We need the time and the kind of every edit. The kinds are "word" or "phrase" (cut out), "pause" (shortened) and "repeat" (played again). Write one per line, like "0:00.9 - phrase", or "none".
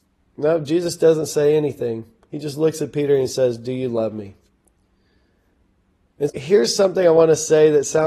0:06.3 - word